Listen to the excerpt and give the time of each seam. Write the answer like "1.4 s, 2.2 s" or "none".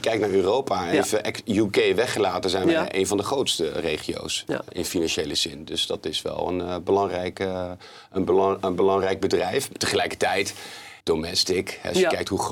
11.0 s